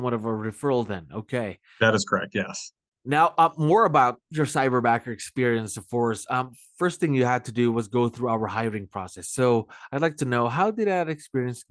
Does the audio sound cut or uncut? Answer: uncut